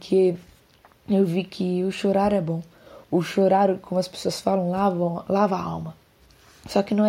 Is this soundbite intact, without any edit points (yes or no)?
no